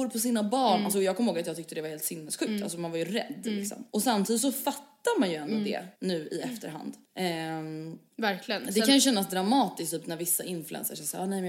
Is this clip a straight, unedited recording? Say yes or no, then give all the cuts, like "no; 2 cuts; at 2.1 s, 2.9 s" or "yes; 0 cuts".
no; 4 cuts; at 3.9 s, 5.9 s, 7.0 s, 8.1 s